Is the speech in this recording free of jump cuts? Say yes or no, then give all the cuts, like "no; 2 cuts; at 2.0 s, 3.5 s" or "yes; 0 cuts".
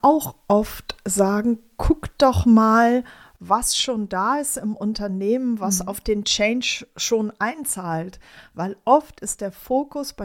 yes; 0 cuts